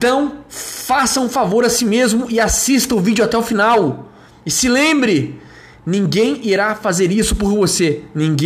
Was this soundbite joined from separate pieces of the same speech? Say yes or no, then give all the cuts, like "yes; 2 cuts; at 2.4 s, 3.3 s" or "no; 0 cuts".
no; 0 cuts